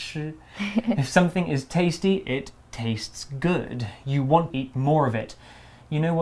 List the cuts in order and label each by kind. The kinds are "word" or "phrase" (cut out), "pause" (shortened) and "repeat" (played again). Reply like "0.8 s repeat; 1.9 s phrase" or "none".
4.5 s word